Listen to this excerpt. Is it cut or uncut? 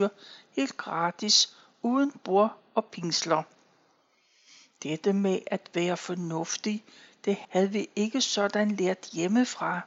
uncut